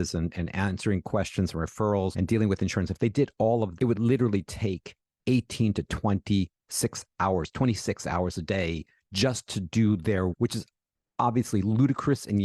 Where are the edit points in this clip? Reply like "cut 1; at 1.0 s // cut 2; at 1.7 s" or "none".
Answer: cut 1; at 2.1 s // cut 2; at 3.8 s // cut 3; at 10.3 s